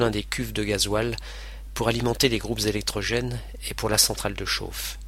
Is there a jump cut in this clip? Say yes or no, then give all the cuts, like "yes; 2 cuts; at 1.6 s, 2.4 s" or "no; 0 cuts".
no; 0 cuts